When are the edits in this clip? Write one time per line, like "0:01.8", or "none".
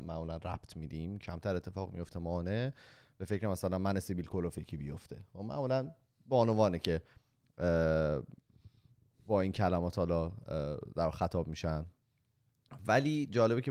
0:02.1